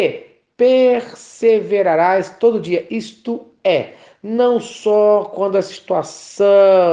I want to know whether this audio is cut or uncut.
uncut